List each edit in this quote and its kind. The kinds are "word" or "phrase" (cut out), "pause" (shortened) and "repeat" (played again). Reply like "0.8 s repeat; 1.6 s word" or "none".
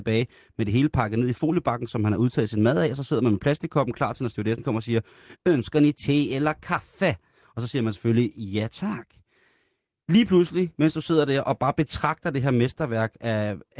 none

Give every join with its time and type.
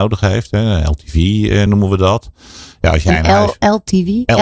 none

